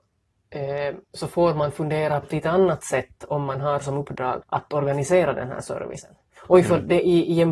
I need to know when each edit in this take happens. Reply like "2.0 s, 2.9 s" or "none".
1.0 s, 2.2 s, 4.4 s